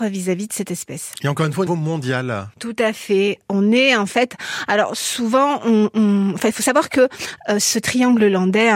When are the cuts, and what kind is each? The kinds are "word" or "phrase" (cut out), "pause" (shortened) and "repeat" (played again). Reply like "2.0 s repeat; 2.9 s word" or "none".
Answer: 1.7 s word